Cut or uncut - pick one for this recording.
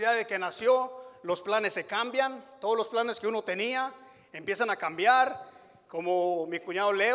uncut